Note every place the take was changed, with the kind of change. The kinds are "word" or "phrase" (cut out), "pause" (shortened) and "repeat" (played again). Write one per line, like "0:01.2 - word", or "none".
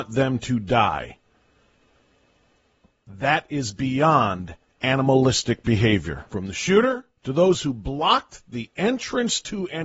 0:06.3 - pause
0:07.2 - pause